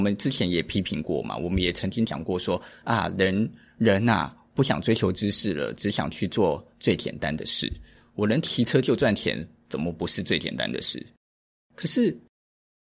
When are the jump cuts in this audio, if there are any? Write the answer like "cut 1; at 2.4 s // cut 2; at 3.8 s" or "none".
none